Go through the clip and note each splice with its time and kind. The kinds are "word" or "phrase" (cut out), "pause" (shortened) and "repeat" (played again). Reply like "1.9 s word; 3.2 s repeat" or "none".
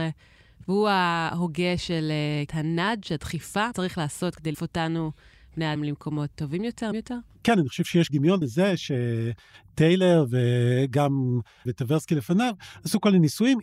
2.5 s word; 3.7 s word; 4.5 s word; 5.8 s word; 6.3 s word; 6.9 s word; 8.1 s word; 8.4 s word; 11.7 s word

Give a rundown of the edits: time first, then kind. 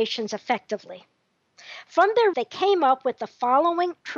2.3 s word

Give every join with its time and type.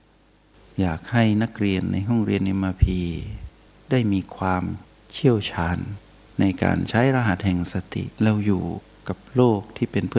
3.7 s pause; 8.1 s pause

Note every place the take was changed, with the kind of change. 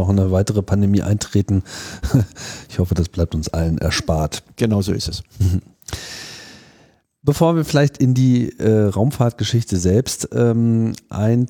none

